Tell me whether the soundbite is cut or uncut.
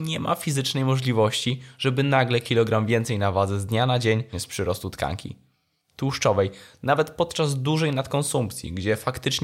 cut